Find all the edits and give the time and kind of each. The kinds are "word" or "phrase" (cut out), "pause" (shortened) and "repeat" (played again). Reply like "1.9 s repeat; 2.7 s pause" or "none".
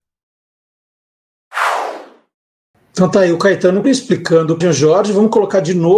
3.8 s word; 4.6 s word